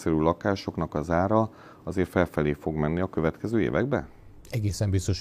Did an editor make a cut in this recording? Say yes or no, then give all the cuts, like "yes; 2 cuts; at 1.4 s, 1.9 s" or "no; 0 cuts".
no; 0 cuts